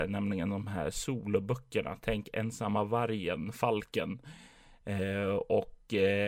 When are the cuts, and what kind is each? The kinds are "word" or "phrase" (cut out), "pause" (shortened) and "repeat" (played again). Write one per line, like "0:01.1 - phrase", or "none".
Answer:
none

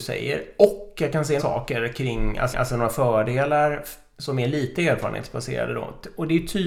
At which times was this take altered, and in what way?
0:01.4 - word
0:02.5 - repeat

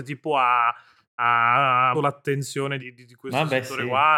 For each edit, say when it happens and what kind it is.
0:01.9 - word
0:02.8 - word

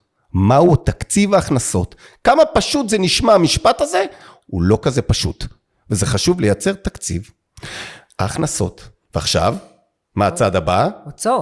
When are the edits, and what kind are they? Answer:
none

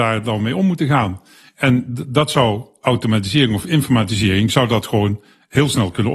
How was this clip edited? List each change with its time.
none

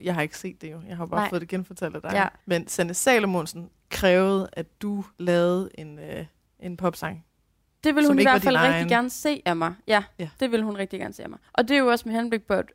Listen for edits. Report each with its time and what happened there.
0:02.4 - pause
0:05.1 - pause
0:06.5 - pause
0:11.5 - pause

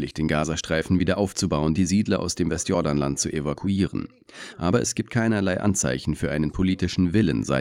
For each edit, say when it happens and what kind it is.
0:01.7 - phrase

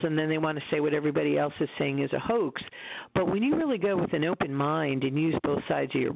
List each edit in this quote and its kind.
none

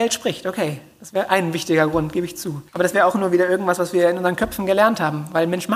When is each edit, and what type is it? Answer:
0:02.7 - pause

